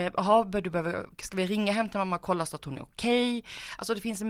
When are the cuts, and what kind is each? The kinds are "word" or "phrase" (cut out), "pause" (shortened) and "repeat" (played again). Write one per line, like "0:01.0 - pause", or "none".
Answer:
none